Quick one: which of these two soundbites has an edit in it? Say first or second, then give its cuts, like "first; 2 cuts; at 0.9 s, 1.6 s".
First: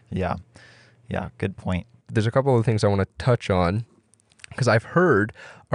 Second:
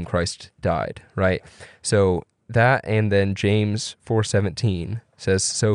second; 1 cut; at 2.3 s